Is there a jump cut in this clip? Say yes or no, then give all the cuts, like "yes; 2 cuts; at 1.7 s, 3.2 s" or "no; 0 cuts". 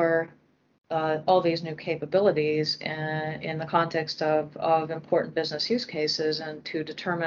no; 0 cuts